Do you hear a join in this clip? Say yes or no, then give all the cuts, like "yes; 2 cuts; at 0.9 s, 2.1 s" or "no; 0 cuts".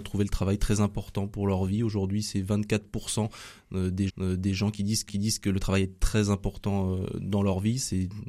yes; 2 cuts; at 4.1 s, 5.1 s